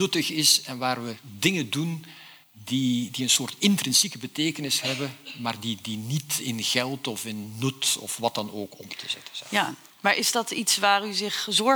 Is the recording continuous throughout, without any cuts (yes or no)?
no